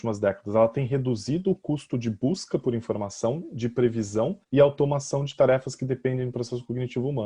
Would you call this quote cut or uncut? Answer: cut